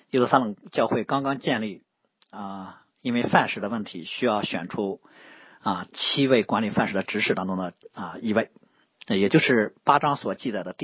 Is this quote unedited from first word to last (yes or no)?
yes